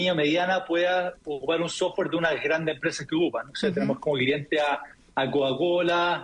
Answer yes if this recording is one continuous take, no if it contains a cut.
yes